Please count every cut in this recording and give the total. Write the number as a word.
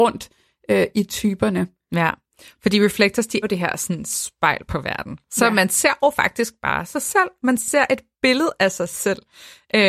one